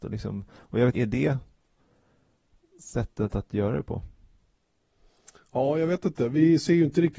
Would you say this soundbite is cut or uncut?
cut